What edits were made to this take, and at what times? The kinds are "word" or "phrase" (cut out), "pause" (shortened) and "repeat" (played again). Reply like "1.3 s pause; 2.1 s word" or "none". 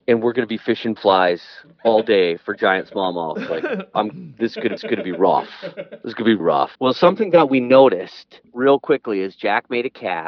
1.0 s word; 4.8 s repeat; 6.4 s word; 6.7 s pause; 8.5 s pause